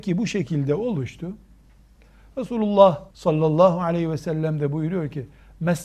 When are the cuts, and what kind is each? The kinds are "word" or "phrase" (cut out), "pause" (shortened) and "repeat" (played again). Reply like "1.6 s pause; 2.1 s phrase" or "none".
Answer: 3.1 s pause